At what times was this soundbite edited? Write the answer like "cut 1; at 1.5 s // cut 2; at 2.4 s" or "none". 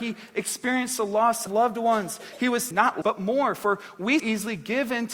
cut 1; at 1.5 s // cut 2; at 2.7 s // cut 3; at 3.0 s // cut 4; at 4.2 s